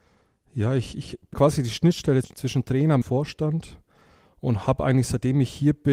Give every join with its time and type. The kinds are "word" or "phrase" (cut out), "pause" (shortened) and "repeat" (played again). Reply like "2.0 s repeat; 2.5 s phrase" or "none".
1.3 s word; 2.2 s word; 3.0 s phrase